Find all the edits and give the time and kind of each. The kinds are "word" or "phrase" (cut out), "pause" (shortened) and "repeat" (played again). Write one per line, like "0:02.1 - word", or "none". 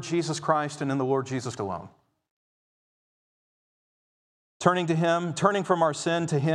0:01.6 - word